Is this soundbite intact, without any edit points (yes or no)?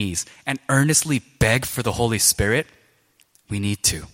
yes